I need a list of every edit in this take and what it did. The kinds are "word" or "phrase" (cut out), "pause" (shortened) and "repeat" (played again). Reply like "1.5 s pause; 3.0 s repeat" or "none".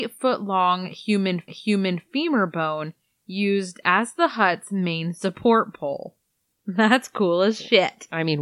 1.5 s repeat